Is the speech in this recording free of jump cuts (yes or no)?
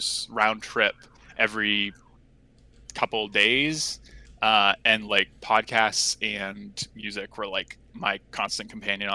yes